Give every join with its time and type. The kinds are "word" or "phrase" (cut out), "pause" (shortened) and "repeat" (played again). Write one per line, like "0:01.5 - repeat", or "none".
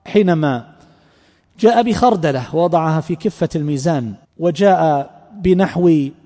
0:04.2 - pause